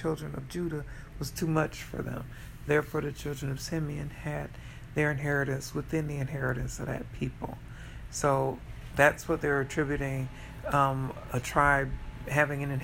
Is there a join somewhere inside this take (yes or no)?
no